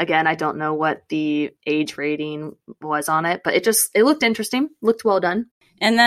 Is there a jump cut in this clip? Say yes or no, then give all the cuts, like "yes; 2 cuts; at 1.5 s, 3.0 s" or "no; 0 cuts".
yes; 1 cut; at 1.6 s